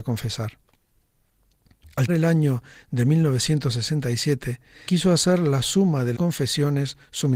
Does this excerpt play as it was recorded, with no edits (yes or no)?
no